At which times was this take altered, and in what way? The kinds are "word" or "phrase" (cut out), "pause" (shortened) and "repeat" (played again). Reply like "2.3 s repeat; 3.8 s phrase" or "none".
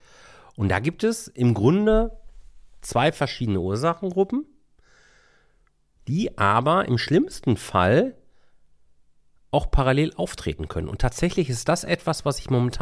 none